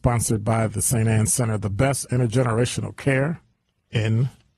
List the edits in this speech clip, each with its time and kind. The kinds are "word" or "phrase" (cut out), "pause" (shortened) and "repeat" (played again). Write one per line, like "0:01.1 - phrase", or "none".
0:03.6 - pause